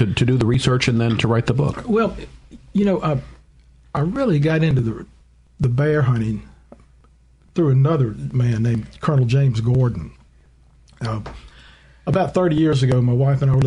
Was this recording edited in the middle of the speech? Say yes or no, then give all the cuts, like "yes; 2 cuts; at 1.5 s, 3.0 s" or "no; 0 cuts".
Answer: no; 0 cuts